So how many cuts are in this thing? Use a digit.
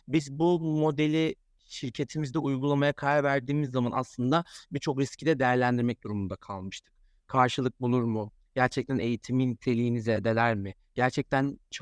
0